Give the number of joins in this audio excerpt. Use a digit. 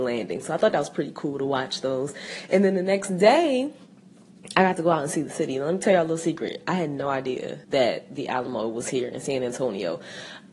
1